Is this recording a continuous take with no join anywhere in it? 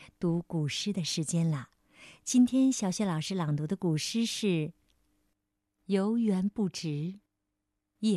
yes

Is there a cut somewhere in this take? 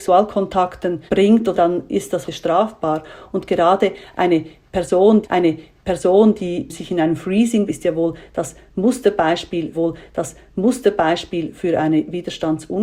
yes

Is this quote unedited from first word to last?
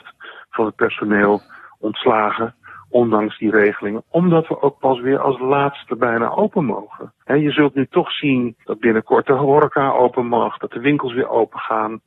no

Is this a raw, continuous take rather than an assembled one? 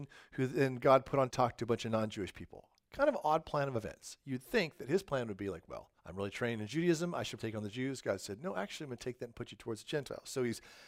no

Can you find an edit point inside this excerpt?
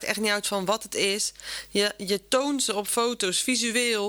no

